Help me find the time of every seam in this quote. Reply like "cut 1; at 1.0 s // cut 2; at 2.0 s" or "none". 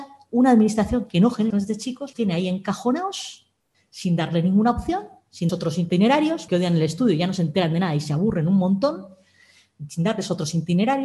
cut 1; at 1.5 s // cut 2; at 2.1 s // cut 3; at 5.5 s // cut 4; at 6.5 s